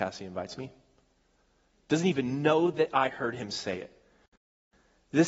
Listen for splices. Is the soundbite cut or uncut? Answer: uncut